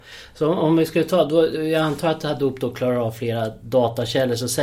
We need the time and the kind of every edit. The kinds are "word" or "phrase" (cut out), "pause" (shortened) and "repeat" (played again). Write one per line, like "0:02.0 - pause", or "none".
none